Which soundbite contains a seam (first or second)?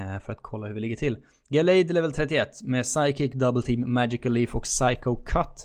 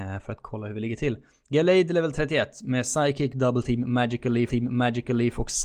second